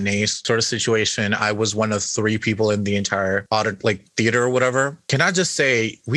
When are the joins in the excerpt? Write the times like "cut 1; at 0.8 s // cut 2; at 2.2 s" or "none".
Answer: cut 1; at 5.0 s